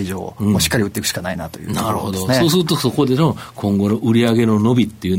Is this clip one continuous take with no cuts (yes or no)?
yes